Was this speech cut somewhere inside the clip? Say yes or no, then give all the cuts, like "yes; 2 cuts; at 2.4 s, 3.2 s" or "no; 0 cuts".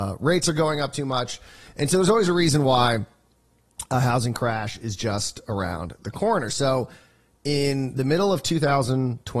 no; 0 cuts